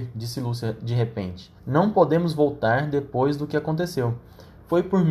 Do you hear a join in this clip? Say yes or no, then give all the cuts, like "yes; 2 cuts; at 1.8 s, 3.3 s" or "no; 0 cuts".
yes; 1 cut; at 1.6 s